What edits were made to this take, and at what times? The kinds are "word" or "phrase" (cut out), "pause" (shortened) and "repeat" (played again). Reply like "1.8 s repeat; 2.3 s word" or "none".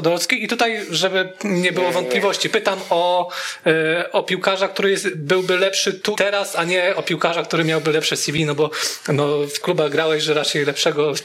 6.2 s word; 9.6 s phrase